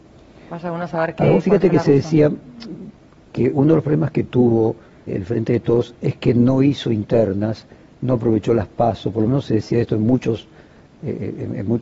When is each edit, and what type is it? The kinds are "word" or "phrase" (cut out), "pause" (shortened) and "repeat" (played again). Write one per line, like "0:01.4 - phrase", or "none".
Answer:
0:05.1 - word